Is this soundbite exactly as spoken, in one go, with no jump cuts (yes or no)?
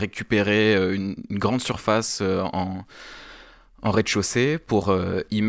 yes